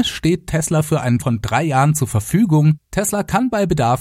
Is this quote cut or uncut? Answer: cut